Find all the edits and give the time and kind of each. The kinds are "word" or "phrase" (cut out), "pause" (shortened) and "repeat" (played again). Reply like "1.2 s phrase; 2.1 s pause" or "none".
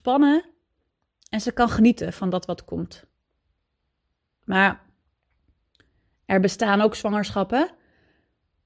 none